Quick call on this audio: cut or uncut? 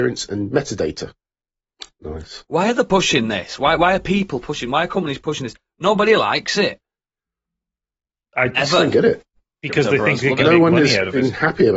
uncut